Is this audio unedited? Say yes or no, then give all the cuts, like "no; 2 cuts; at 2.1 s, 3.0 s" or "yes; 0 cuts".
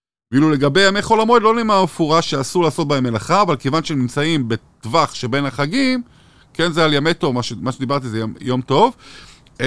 yes; 0 cuts